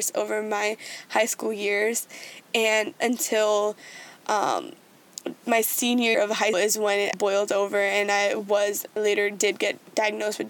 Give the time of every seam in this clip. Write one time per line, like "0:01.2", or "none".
0:03.0
0:06.1
0:06.5
0:07.1
0:09.0